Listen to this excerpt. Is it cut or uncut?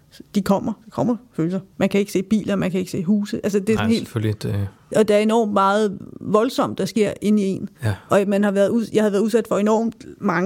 cut